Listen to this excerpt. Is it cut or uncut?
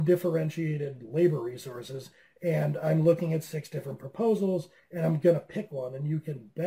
uncut